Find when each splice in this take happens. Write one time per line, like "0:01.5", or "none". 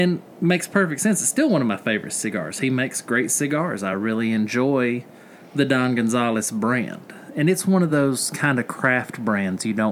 none